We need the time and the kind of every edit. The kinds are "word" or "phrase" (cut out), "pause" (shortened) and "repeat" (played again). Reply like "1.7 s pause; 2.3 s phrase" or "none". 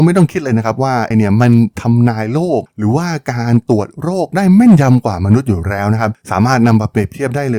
1.1 s word